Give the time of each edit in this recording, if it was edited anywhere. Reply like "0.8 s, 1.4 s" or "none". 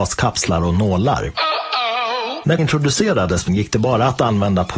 2.6 s, 3.5 s

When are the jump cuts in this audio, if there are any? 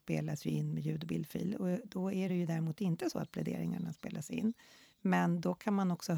none

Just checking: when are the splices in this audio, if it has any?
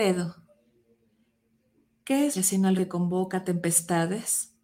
2.3 s, 2.8 s

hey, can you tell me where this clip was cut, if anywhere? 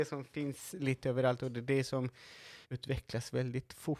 2.6 s

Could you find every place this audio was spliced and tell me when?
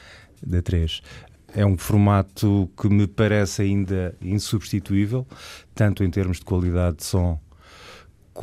none

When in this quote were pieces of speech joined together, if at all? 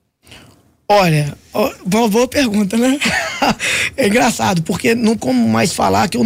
5.2 s

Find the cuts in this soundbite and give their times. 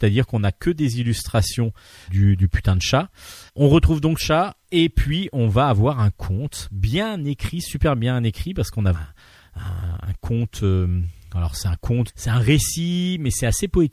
2.1 s, 3.5 s, 4.2 s, 8.9 s, 12.1 s

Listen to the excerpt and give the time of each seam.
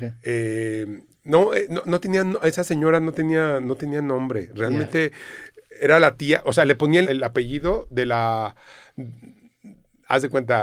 7.0 s

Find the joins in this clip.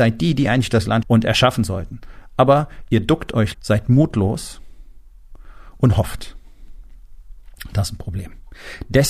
1.0 s, 3.5 s

